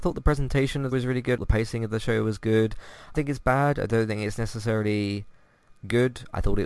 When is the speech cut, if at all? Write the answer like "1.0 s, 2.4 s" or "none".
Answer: 0.9 s, 1.4 s, 3.1 s